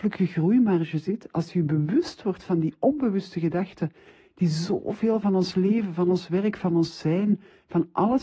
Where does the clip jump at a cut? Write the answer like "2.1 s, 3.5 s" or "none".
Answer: none